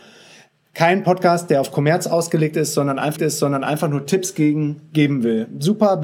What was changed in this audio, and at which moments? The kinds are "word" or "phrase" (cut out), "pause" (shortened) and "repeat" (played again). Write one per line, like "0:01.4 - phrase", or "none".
0:03.2 - repeat